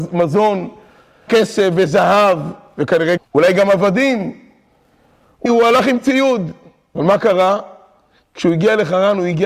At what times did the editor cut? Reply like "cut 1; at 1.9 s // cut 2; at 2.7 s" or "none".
cut 1; at 1.3 s // cut 2; at 3.2 s // cut 3; at 5.5 s